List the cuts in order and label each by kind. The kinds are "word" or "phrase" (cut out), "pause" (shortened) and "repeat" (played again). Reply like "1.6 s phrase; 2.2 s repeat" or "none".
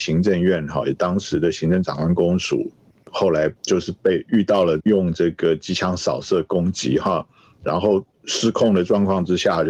3.6 s pause